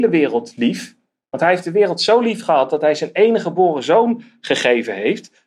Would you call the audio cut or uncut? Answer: uncut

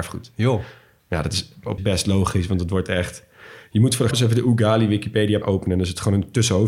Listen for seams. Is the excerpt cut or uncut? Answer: cut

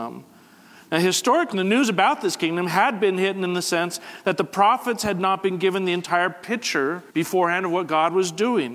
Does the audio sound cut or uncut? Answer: cut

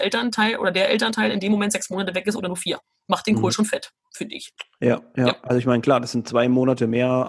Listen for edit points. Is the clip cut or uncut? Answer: uncut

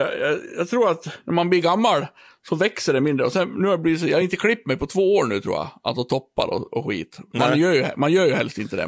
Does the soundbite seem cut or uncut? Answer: uncut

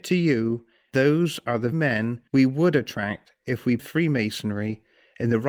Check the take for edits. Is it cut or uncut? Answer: cut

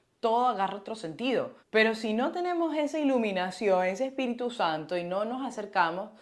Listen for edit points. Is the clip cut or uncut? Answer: cut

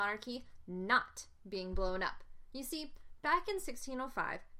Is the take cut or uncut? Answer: uncut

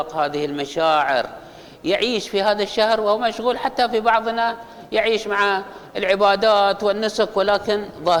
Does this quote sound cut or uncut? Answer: uncut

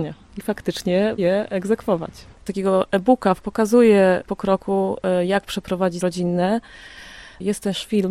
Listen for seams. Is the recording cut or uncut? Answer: cut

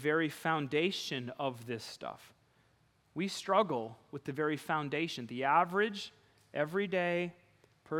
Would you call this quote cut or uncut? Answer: uncut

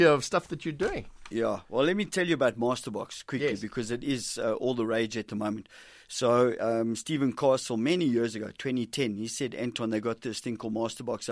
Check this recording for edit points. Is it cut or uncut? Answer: uncut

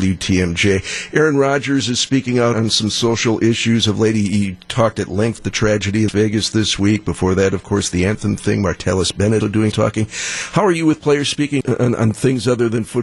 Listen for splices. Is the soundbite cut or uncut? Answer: cut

